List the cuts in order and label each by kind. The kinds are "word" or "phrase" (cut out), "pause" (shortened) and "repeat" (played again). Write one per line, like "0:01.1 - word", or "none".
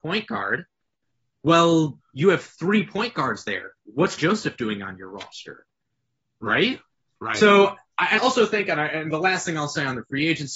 0:04.2 - word
0:08.2 - word

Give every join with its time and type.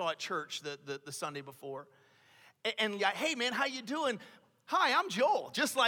0:03.0 - word

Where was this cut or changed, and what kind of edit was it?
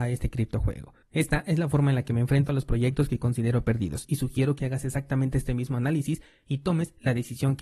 0:01.0 - pause

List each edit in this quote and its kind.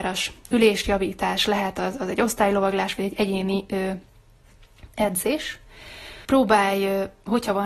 0:06.2 - pause

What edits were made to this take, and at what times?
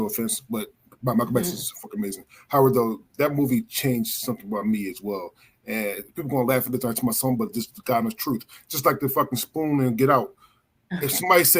none

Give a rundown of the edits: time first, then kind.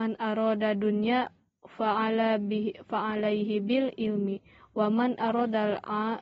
none

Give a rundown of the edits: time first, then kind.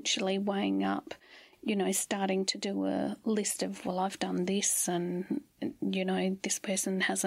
none

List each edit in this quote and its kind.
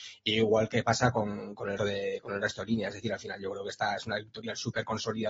0:01.8 - word

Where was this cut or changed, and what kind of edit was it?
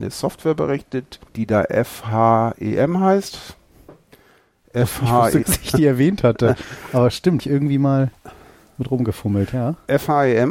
0:01.3 - pause
0:05.4 - phrase
0:07.4 - word

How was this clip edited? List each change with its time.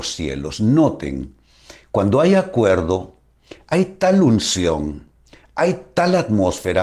none

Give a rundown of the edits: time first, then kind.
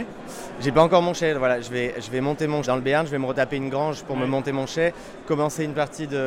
0:02.6 - word

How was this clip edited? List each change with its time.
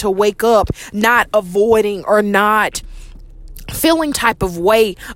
0:04.1 - word

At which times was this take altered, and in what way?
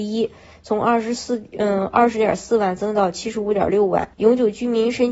0:04.1 - pause

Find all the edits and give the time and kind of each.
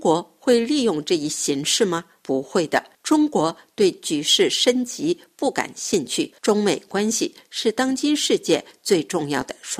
0:06.4 - pause

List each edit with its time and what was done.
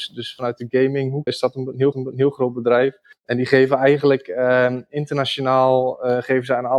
0:01.3 - word
0:01.9 - repeat
0:03.1 - pause

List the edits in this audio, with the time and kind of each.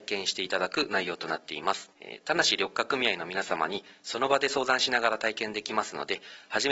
0:01.9 - pause

